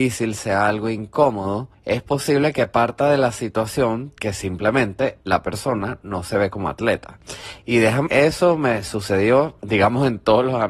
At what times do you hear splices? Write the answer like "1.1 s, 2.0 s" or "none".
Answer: 1.7 s, 5.2 s, 8.1 s, 9.6 s